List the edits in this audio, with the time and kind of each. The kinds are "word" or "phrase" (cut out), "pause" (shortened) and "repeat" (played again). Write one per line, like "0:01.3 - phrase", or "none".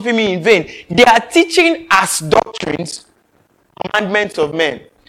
none